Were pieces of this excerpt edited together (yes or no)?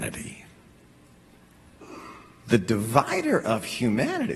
no